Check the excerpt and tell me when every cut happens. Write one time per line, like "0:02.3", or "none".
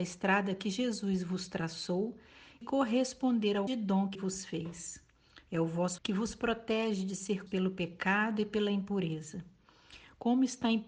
0:02.6
0:03.7
0:04.1
0:06.0
0:07.5